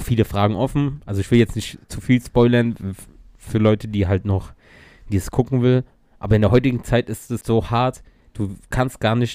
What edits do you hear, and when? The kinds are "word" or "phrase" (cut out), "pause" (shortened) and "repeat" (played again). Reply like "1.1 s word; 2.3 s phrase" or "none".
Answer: 7.4 s word